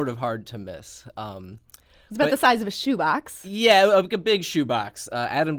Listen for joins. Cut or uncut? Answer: uncut